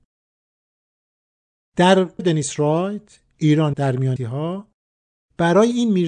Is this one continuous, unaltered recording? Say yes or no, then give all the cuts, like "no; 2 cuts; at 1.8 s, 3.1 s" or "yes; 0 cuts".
no; 3 cuts; at 2.2 s, 3.7 s, 4.2 s